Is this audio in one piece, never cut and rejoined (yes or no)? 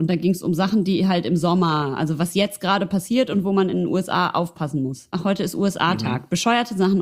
yes